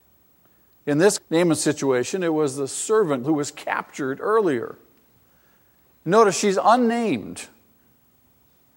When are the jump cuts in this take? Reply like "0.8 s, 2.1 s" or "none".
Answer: 1.2 s, 3.2 s